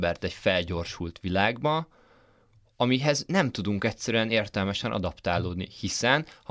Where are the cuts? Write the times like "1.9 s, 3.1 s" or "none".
none